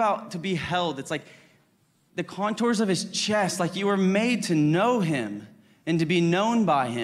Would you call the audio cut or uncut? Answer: uncut